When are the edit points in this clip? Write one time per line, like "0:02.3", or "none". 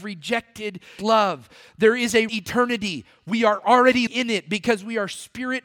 0:01.0
0:02.3
0:04.1